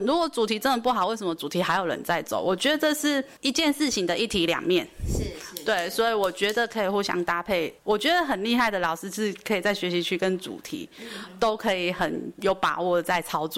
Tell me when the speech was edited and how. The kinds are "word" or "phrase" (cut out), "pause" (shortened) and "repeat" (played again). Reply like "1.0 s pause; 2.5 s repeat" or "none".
3.4 s pause; 7.8 s pause